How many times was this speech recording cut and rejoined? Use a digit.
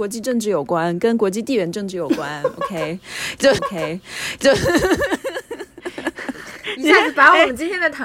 1